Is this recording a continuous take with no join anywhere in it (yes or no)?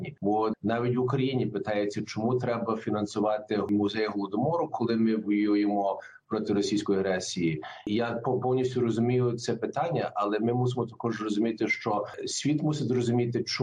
yes